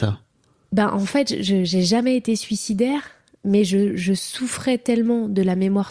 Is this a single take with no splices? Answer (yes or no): yes